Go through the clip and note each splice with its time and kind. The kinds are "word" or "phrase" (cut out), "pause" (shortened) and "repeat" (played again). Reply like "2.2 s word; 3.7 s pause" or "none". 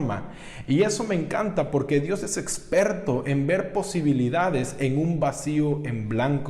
none